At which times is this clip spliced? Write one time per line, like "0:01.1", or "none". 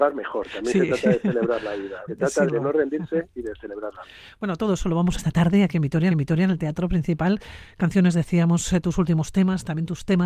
0:02.1
0:02.5
0:05.2
0:06.1